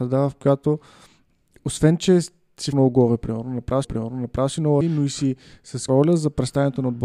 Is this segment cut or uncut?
cut